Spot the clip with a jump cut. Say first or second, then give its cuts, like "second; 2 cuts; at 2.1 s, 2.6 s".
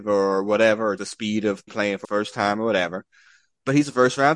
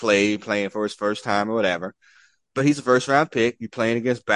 first; 3 cuts; at 1.0 s, 1.7 s, 2.0 s